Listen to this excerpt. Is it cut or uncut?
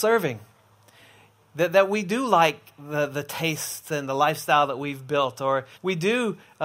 cut